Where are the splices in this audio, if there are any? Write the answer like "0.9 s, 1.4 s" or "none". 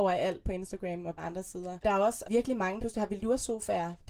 1.2 s, 2.2 s, 2.8 s